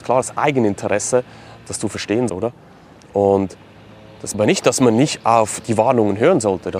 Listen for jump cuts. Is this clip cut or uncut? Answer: cut